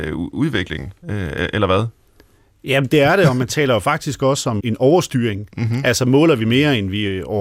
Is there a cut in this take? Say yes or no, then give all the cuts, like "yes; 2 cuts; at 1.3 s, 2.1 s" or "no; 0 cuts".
yes; 2 cuts; at 2.9 s, 4.6 s